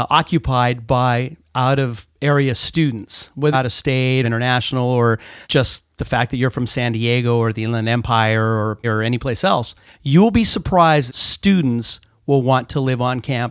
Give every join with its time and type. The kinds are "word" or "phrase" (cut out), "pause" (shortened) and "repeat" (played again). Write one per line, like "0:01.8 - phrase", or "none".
0:03.5 - word
0:04.2 - word
0:05.4 - pause
0:08.8 - word
0:09.9 - pause
0:11.1 - phrase